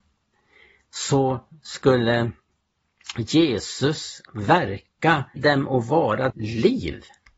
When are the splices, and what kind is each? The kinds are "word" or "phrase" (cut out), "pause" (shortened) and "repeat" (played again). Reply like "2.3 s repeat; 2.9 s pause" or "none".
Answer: 4.3 s word; 5.4 s word; 6.3 s word